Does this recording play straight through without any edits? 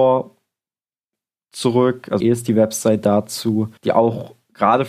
no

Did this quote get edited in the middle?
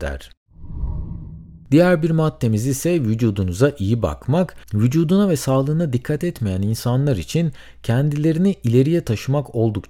no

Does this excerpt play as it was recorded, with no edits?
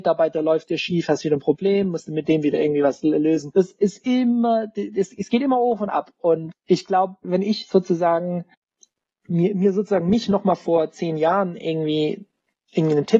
yes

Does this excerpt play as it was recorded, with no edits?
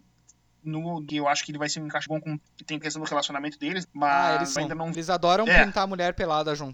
no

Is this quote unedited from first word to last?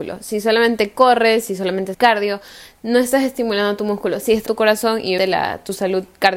no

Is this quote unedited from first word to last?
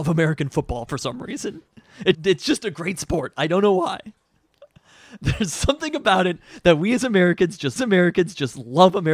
no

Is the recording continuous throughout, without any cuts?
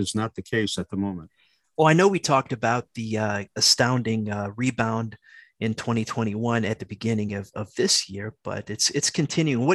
yes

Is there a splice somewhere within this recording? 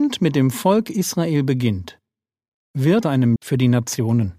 yes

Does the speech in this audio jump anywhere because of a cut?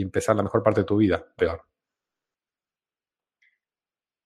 yes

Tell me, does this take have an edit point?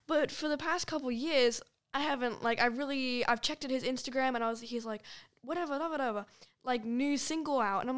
no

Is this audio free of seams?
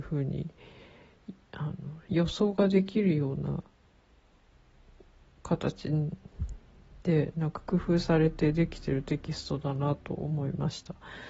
yes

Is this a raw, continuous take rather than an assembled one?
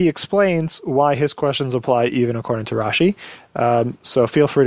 yes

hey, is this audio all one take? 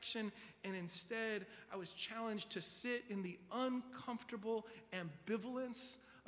yes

